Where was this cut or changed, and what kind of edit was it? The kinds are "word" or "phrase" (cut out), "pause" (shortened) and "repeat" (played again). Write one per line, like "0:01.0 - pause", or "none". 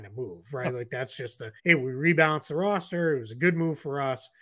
0:01.6 - pause